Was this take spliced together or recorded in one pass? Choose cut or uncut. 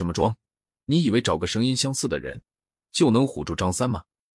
uncut